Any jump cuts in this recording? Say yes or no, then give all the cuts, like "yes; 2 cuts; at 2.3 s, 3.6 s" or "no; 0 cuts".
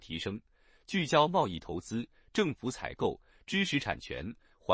no; 0 cuts